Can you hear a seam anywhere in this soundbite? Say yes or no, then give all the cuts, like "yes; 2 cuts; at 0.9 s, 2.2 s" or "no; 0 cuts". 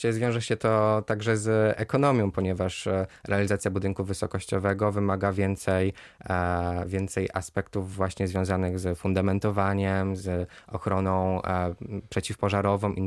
no; 0 cuts